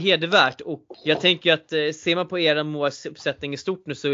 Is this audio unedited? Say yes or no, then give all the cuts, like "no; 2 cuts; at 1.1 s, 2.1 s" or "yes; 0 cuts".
no; 1 cut; at 0.9 s